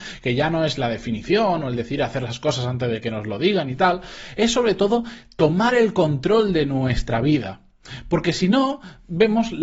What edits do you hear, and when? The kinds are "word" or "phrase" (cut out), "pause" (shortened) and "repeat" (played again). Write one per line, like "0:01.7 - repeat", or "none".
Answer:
none